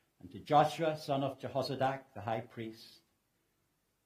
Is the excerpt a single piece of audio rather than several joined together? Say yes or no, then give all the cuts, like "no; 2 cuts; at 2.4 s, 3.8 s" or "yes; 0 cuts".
yes; 0 cuts